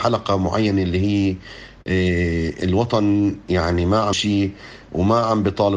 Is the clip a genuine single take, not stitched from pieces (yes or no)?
no